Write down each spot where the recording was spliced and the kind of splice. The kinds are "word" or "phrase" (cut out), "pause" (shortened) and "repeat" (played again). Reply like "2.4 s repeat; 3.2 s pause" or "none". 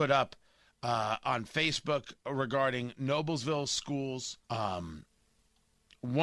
4.4 s pause